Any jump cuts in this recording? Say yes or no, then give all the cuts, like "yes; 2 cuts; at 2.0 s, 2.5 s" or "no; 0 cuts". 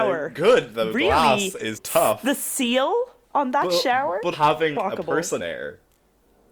yes; 5 cuts; at 1.7 s, 3.2 s, 4.3 s, 4.7 s, 5.4 s